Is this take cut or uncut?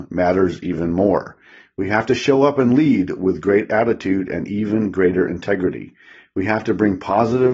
uncut